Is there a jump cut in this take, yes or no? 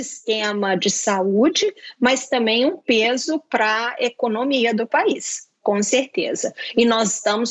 no